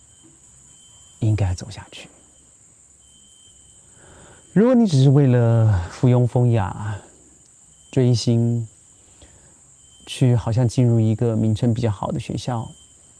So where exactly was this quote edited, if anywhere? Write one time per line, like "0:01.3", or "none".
none